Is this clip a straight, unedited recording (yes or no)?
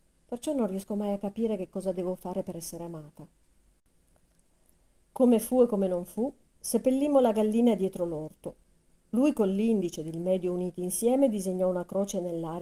yes